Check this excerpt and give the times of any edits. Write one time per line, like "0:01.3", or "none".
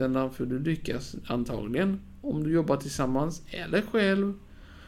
none